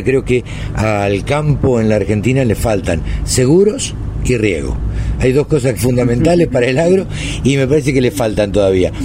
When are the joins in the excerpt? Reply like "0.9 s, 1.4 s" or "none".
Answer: 5.8 s

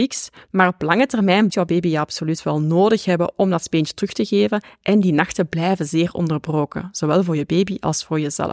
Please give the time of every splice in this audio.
1.5 s

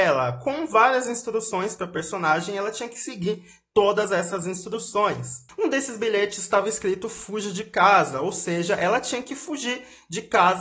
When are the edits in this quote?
none

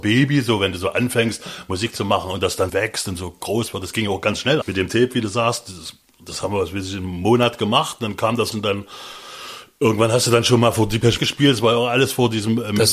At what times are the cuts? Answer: 2.7 s, 4.6 s, 8.5 s, 11.2 s

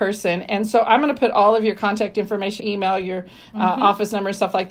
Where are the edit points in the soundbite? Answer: 2.6 s

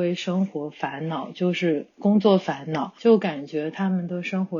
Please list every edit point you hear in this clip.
none

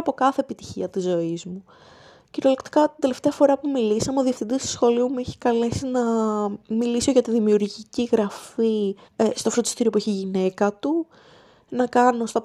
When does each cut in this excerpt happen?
6.6 s, 9.1 s

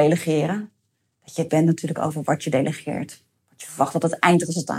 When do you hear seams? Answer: 1.5 s

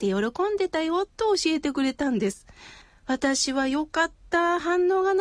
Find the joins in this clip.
1.1 s, 2.8 s

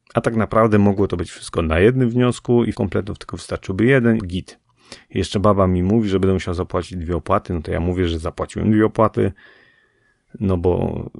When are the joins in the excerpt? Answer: 2.7 s, 4.2 s

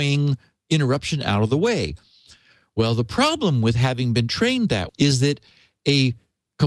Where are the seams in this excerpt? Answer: 4.9 s

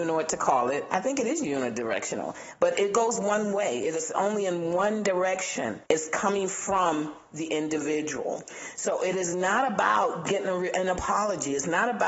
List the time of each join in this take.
0.9 s, 4.1 s, 5.9 s

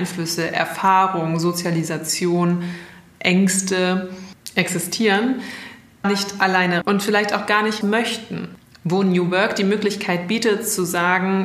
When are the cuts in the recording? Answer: 6.0 s, 6.8 s, 7.8 s

